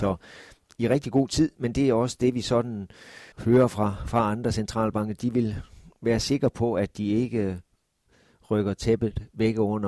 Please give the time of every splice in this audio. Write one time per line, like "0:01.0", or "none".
0:03.3